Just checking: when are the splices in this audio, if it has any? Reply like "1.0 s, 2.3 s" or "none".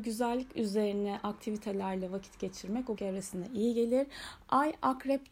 3.0 s